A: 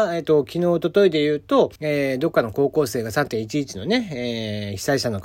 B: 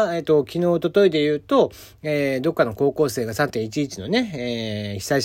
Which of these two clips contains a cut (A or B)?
A